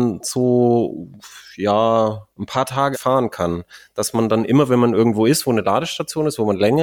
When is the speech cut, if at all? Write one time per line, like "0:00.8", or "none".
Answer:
0:02.3
0:02.9